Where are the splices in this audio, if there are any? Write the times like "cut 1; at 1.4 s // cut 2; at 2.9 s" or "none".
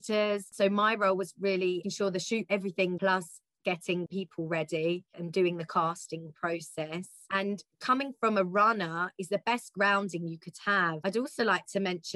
cut 1; at 1.8 s // cut 2; at 2.5 s // cut 3; at 3.0 s // cut 4; at 4.1 s // cut 5; at 5.1 s

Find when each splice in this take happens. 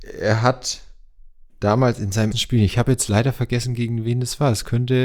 cut 1; at 2.3 s

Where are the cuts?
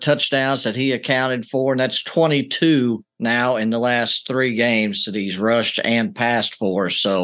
cut 1; at 3.1 s

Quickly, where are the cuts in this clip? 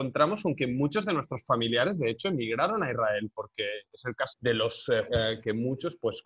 cut 1; at 4.3 s // cut 2; at 5.1 s

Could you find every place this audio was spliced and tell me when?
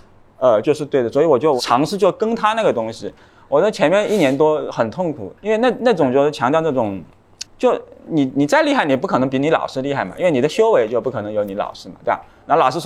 cut 1; at 5.4 s // cut 2; at 7.5 s

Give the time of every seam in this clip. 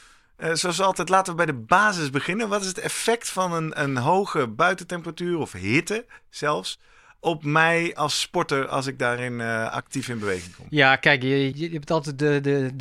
cut 1; at 11.5 s

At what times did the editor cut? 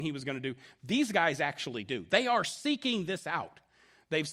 none

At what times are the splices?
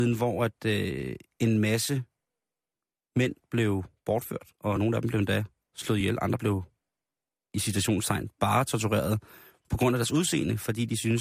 none

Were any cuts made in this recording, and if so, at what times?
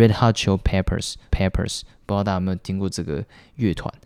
cut 1; at 1.3 s

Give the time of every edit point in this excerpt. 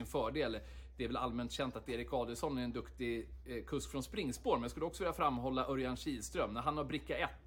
none

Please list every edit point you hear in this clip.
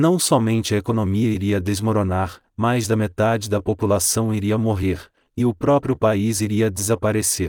none

